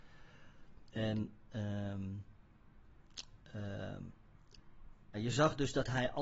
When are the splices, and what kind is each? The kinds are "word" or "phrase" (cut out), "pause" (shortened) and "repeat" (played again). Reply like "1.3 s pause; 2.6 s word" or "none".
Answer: 5.1 s word